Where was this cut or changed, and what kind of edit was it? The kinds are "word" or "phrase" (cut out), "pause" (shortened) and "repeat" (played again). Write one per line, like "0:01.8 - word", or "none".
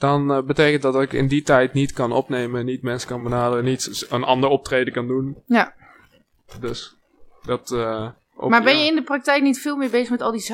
none